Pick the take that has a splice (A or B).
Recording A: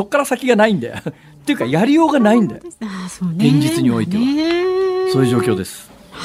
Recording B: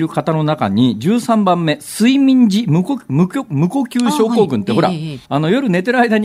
B